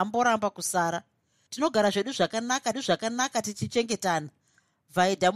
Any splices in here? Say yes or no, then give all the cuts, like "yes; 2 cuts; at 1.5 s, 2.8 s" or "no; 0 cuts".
yes; 1 cut; at 2.7 s